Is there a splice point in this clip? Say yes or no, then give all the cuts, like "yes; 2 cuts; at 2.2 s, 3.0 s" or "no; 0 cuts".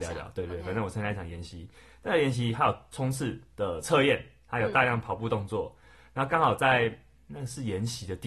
no; 0 cuts